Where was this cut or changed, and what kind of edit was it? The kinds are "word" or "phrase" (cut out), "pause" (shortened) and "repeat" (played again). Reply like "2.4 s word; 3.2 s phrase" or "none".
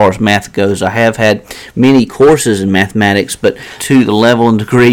2.1 s word; 3.8 s word